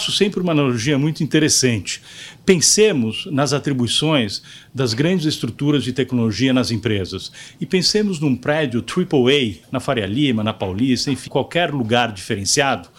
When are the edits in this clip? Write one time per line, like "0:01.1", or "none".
0:09.6
0:11.3